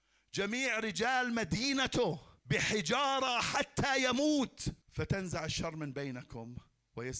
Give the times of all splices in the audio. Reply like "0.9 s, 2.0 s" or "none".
2.4 s, 4.8 s